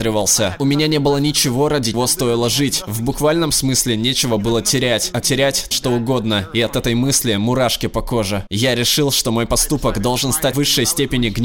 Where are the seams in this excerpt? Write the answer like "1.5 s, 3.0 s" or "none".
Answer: 1.9 s, 5.2 s, 5.7 s, 10.5 s